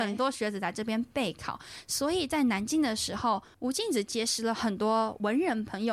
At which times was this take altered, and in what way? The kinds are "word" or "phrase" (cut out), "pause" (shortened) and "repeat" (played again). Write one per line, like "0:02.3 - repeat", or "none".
none